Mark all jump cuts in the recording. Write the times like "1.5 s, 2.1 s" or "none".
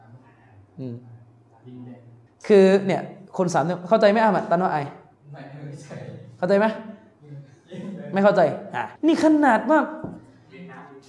2.3 s, 5.1 s, 9.0 s